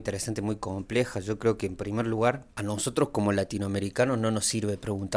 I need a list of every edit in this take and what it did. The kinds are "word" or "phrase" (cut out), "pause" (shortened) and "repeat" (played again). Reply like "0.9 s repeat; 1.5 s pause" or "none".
2.5 s pause

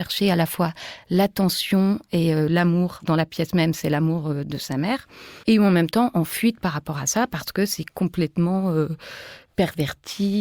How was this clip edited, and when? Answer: 5.4 s pause

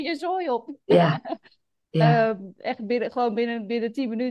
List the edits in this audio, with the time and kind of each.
none

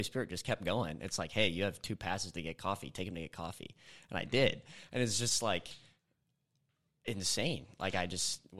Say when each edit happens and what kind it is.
none

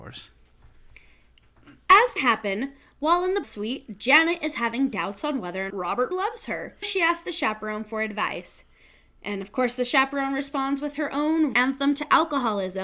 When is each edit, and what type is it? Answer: 2.2 s word; 3.4 s word; 5.7 s word; 6.1 s word; 6.8 s word; 11.5 s word

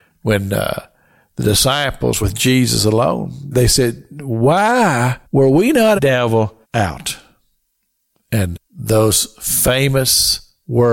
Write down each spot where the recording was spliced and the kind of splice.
2.2 s word; 3.5 s word; 5.2 s pause; 6.0 s phrase; 6.6 s pause; 8.5 s word

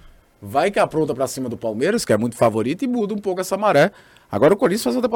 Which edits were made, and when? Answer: none

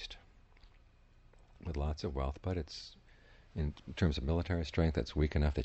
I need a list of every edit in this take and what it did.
none

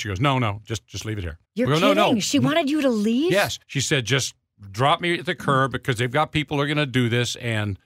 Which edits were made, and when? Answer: 1.4 s pause; 3.6 s pause

